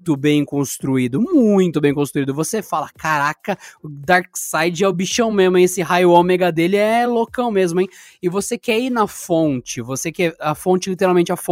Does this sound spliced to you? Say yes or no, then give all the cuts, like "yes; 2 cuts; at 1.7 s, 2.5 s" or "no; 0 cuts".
no; 0 cuts